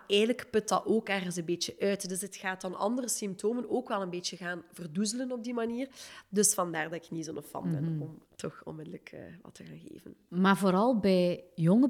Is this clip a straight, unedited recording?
yes; 0 cuts

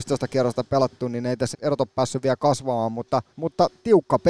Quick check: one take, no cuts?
no; 2 cuts; at 1.5 s, 3.3 s

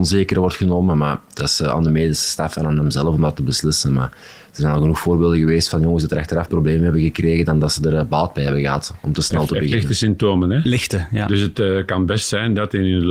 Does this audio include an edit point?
yes; 1 cut; at 6.5 s

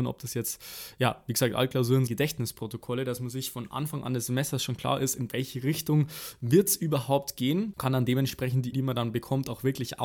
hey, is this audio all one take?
no; 3 cuts; at 2.1 s, 7.8 s, 8.7 s

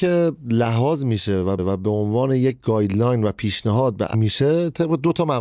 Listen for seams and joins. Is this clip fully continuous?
no; 2 cuts; at 1.6 s, 4.1 s

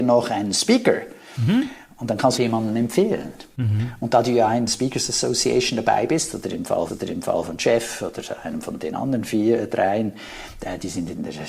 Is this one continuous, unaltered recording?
no; 3 cuts; at 2.4 s, 4.7 s, 6.9 s

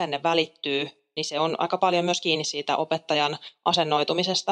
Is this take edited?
no; 0 cuts

